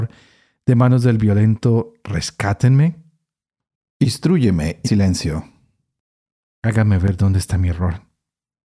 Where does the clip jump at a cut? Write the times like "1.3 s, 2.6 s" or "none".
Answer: 4.8 s